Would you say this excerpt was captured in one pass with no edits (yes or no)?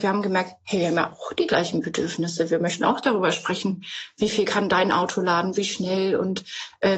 yes